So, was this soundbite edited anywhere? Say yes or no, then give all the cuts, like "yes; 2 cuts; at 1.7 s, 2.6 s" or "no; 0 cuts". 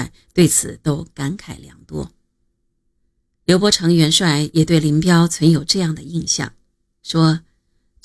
no; 0 cuts